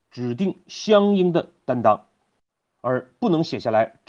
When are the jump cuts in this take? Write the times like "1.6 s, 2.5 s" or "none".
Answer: none

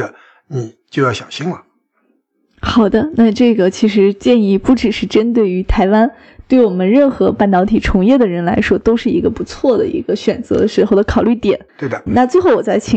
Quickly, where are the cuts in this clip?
11.7 s, 12.1 s

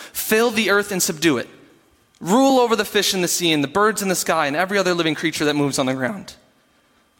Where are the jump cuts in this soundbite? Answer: none

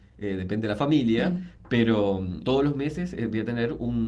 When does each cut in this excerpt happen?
2.4 s

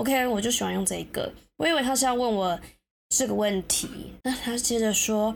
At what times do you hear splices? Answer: 4.2 s

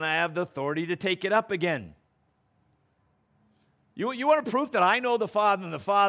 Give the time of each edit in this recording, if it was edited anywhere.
none

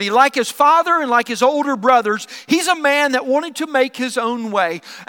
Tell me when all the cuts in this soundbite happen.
none

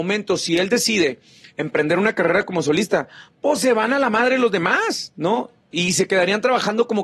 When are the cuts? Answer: none

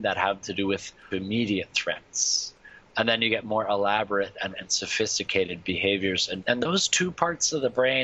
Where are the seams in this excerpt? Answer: 1.1 s, 4.5 s, 6.4 s

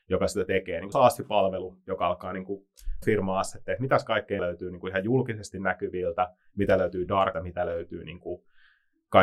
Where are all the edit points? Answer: 0.9 s, 3.0 s, 4.4 s, 7.3 s

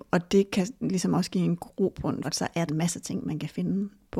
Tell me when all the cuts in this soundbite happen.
2.2 s, 2.7 s

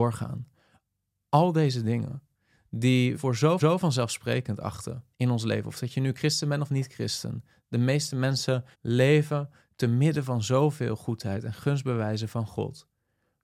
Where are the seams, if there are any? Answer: 3.1 s, 3.6 s, 5.1 s, 8.7 s

